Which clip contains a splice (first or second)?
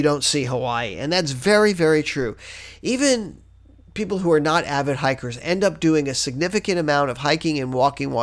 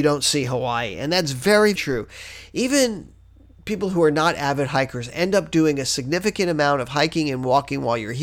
second